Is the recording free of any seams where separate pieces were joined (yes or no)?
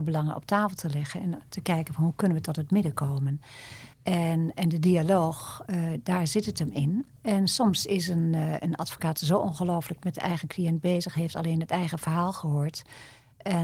no